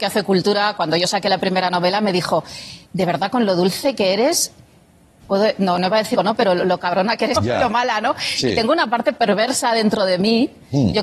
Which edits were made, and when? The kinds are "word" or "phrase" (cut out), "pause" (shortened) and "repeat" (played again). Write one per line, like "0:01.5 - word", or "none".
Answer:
0:02.8 - pause
0:05.2 - word
0:06.2 - phrase
0:07.4 - word

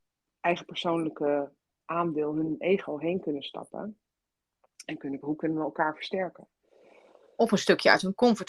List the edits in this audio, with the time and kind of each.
0:05.2 - word

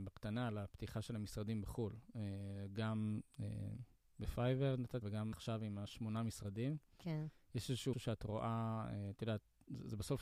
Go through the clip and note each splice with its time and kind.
0:05.0 - word
0:05.3 - word
0:07.9 - word

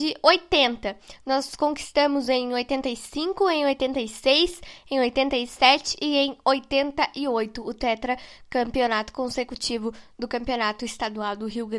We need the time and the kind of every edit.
none

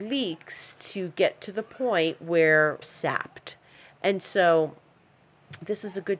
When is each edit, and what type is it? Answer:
0:02.8 - word

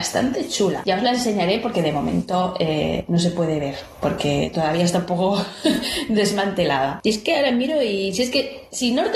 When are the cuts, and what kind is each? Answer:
none

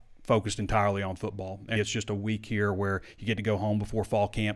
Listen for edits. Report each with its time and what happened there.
0:01.8 - word

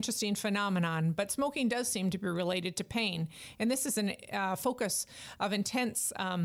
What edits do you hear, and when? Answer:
none

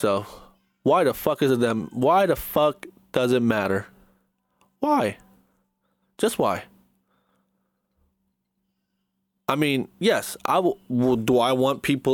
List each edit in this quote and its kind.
none

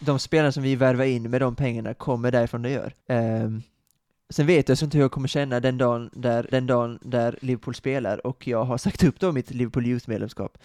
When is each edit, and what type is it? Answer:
0:03.0 - pause
0:04.8 - word
0:06.5 - repeat

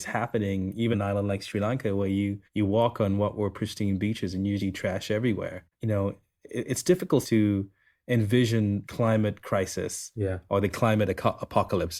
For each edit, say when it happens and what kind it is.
0:00.9 - word
0:02.5 - pause
0:04.6 - word
0:05.7 - pause
0:07.2 - word
0:08.8 - word

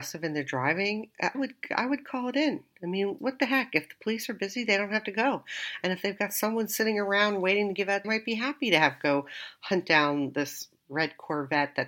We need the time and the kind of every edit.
0:01.3 - word
0:03.2 - word
0:08.0 - phrase

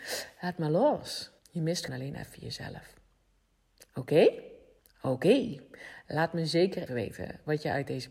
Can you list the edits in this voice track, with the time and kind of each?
0:01.4 - pause
0:01.9 - word
0:04.8 - pause
0:06.9 - word

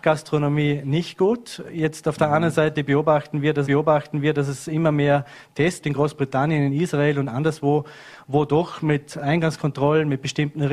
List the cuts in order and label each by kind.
0:03.7 - repeat
0:05.8 - phrase

